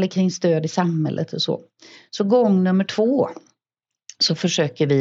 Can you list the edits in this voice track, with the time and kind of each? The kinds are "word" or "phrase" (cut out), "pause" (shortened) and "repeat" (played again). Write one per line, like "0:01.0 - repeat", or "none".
none